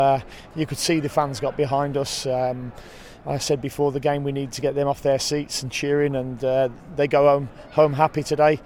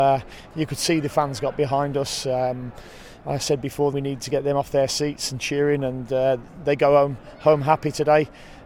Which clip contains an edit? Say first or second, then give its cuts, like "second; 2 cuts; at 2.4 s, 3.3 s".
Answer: second; 1 cut; at 3.9 s